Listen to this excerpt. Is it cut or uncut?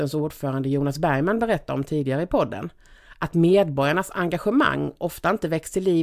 uncut